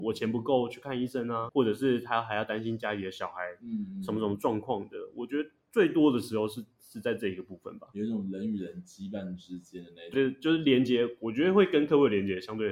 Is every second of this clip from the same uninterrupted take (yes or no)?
no